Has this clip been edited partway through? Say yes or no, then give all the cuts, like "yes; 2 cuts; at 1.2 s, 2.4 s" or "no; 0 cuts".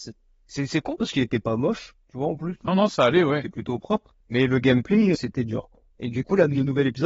yes; 3 cuts; at 2.7 s, 4.2 s, 5.1 s